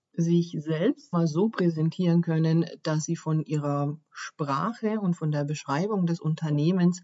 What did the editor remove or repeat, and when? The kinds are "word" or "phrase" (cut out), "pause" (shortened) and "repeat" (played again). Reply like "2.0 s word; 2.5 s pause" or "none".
1.1 s word